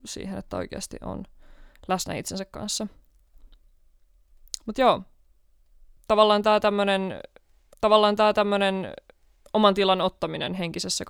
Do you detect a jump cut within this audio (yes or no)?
yes